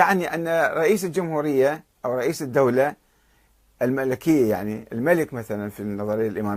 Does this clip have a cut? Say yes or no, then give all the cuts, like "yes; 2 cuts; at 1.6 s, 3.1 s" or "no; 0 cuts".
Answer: no; 0 cuts